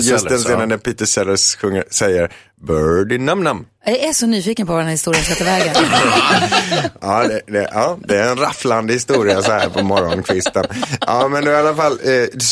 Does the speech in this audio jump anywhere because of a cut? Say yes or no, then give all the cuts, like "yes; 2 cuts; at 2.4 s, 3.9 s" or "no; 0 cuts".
yes; 1 cut; at 7.0 s